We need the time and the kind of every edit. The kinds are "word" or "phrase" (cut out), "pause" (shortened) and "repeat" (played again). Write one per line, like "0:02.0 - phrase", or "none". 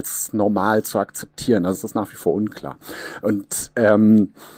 0:01.7 - word

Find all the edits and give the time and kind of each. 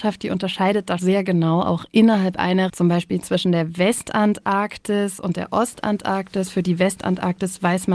0:01.0 - word
0:02.7 - word

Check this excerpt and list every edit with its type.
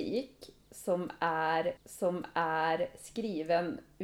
0:01.8 - repeat

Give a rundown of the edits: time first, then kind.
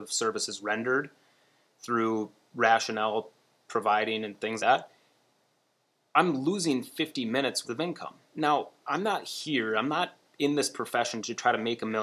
0:04.6 - word
0:07.6 - word

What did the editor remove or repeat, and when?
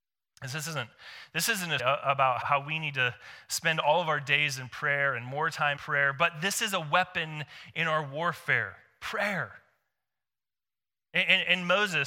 0:01.8 - word
0:02.4 - word
0:05.8 - word

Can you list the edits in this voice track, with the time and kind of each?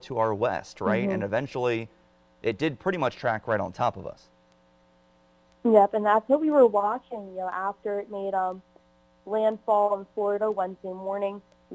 none

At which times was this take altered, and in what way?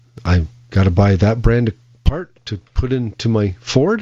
none

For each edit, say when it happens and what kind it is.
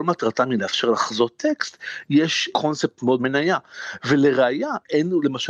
0:02.5 - word
0:03.2 - phrase

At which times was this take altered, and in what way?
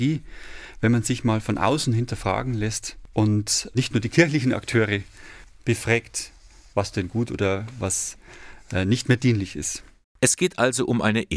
none

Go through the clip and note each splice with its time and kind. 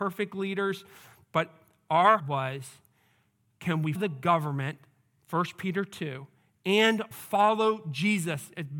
0:02.2 - word
0:03.9 - word
0:07.1 - word

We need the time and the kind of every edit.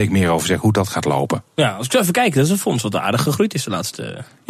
none

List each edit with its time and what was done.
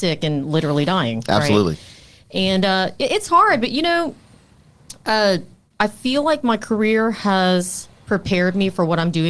0:05.7 - pause

